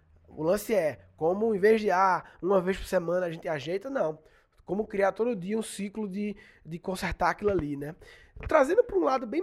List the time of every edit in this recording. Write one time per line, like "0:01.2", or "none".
none